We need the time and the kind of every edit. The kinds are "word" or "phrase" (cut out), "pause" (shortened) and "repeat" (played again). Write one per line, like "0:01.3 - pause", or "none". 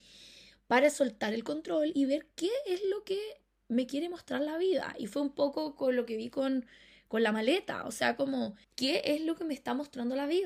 0:08.6 - pause